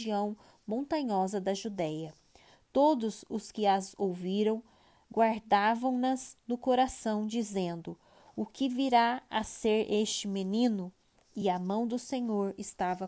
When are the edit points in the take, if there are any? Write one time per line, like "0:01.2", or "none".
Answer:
none